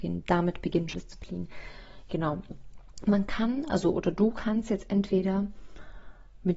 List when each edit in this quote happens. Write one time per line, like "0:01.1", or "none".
0:00.9